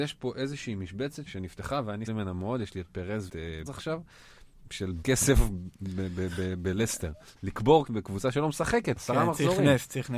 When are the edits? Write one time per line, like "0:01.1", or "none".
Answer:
0:01.3
0:02.1
0:03.3
0:03.7
0:05.0
0:07.4
0:07.9
0:09.0